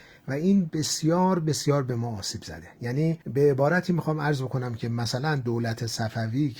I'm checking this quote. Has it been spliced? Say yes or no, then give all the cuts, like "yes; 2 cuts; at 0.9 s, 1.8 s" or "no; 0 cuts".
yes; 1 cut; at 3.2 s